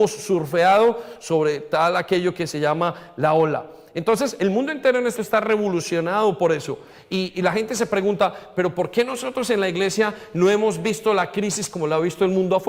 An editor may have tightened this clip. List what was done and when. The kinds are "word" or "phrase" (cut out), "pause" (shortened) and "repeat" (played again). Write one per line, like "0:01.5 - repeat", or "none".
0:05.2 - word
0:07.3 - word